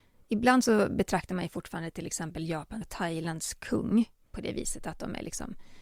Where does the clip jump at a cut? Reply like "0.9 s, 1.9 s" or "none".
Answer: 2.8 s